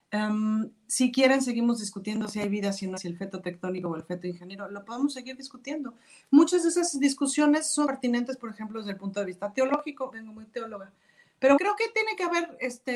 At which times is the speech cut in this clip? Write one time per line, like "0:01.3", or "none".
0:03.0
0:07.9
0:10.1
0:11.6